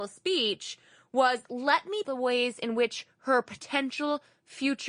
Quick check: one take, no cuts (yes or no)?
no